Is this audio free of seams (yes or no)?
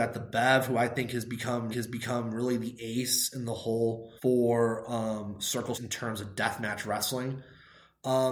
no